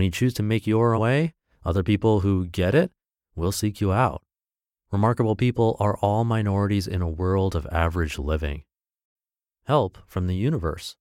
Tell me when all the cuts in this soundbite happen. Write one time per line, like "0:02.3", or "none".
0:01.0